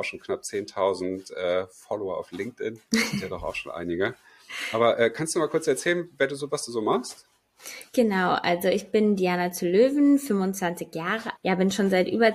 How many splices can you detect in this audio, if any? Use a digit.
4